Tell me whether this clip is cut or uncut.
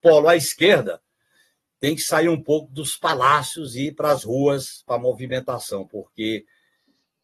uncut